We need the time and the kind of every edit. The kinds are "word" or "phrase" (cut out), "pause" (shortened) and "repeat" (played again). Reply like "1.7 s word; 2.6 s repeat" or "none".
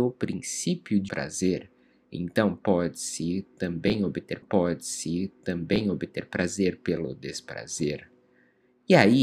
1.1 s word; 4.4 s repeat